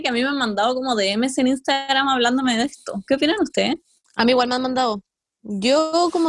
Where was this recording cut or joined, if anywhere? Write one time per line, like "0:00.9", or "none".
none